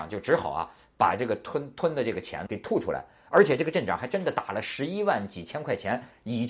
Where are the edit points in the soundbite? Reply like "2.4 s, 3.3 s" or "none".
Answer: 2.5 s